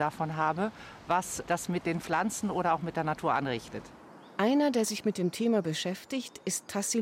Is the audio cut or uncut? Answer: uncut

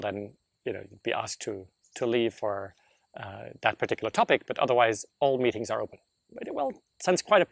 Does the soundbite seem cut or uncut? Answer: uncut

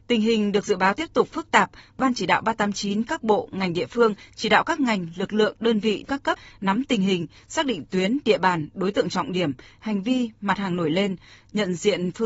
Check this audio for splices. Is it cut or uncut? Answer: uncut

